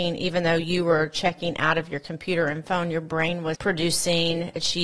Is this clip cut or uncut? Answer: cut